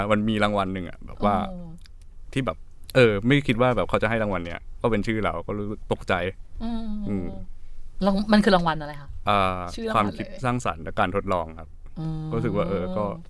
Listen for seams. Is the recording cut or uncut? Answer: uncut